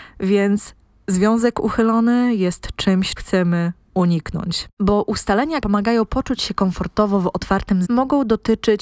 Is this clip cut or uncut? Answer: cut